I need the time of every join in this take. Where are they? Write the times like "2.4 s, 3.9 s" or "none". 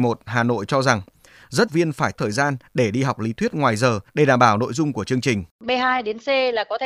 1.7 s, 2.1 s, 4.1 s, 5.5 s